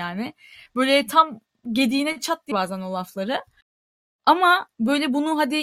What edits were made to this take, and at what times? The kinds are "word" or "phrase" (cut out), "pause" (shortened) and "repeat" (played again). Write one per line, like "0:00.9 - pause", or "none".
0:02.5 - word